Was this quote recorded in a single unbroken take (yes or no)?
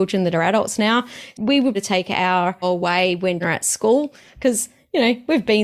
no